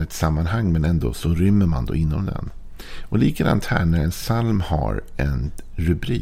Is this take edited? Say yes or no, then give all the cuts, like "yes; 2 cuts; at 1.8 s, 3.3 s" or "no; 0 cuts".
no; 0 cuts